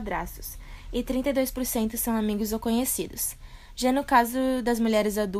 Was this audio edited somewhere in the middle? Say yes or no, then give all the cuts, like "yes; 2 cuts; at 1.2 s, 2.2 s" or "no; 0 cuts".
no; 0 cuts